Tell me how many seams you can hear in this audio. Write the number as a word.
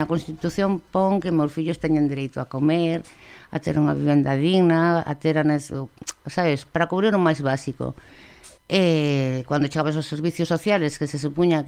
one